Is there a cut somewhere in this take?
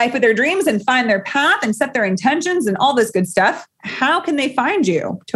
no; 0 cuts

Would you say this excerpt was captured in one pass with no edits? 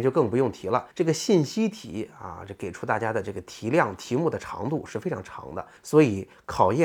no; 2 cuts; at 0.9 s, 5.8 s

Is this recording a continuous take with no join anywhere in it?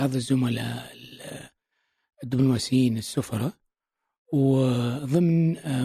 yes; 0 cuts

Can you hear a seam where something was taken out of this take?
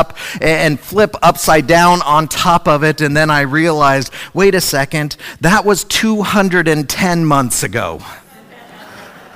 no; 0 cuts

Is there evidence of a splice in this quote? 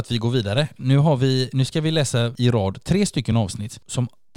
no; 0 cuts

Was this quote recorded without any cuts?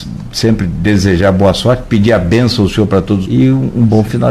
no; 1 cut; at 3.2 s

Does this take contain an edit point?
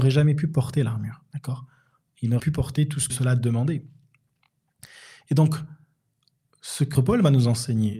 yes; 3 cuts; at 2.4 s, 3.1 s, 6.9 s

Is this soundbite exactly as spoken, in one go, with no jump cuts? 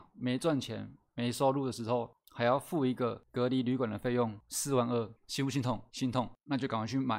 no; 1 cut; at 5.9 s

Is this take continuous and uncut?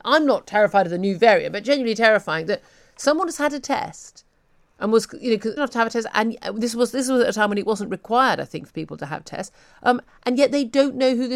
no; 1 cut; at 5.6 s

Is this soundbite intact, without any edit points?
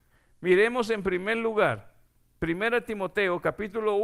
yes; 0 cuts

